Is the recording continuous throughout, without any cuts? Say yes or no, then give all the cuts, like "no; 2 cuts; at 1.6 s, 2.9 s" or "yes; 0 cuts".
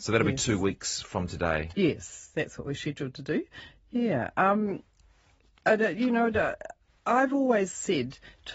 yes; 0 cuts